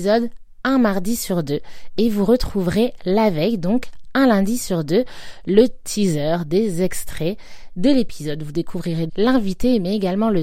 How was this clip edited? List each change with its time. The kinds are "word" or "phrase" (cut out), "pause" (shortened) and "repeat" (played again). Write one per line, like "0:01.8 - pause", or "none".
0:09.1 - word